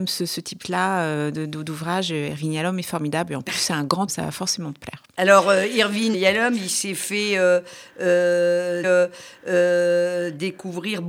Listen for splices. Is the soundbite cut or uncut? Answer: cut